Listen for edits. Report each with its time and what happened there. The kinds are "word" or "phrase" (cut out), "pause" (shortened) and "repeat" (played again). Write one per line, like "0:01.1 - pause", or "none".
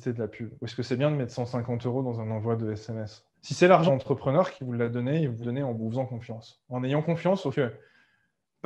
0:03.3 - pause
0:03.9 - word
0:05.4 - word
0:07.5 - word